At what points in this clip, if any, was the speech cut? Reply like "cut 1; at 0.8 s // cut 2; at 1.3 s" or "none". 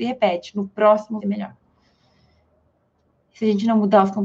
cut 1; at 1.2 s